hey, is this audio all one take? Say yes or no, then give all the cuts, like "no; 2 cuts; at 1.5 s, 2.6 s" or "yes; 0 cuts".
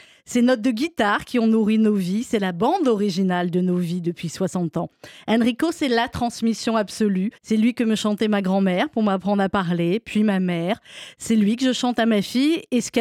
no; 1 cut; at 7.4 s